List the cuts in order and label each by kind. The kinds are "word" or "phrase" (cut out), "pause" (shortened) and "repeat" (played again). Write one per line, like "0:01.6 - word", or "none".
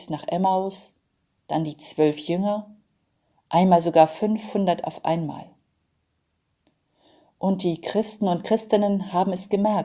none